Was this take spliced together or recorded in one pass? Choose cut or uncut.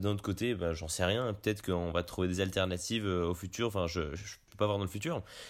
cut